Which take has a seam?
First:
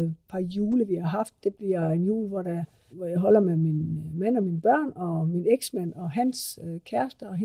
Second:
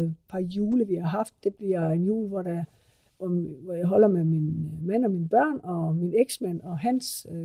first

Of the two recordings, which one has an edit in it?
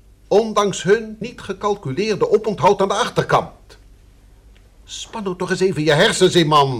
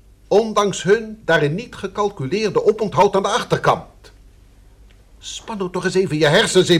first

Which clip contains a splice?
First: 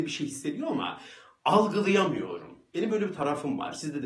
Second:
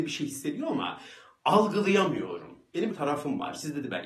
second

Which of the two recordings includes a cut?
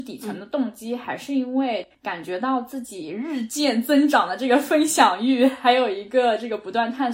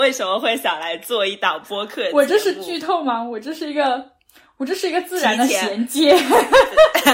first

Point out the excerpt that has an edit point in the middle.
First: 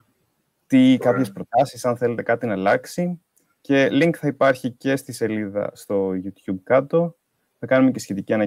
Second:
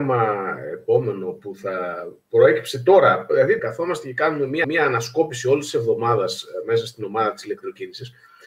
second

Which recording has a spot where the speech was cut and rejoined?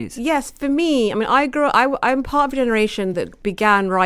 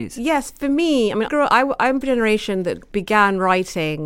second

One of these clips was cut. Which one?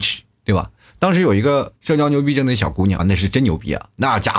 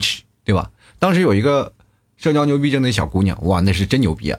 first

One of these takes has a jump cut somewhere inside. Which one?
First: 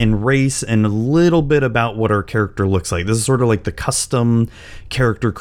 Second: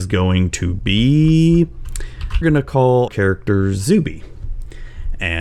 second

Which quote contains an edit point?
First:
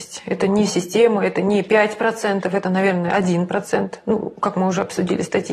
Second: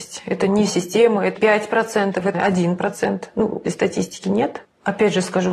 second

